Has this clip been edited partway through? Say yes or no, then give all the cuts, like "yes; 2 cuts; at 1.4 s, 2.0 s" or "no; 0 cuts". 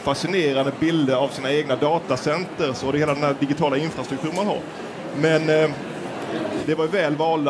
no; 0 cuts